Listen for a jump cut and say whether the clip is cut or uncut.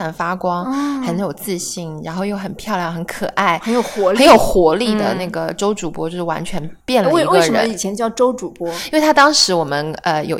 cut